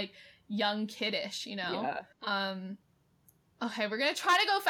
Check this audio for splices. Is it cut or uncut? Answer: cut